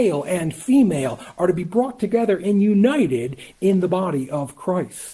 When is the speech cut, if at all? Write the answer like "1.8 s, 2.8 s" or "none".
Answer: none